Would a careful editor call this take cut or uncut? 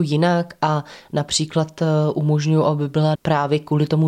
cut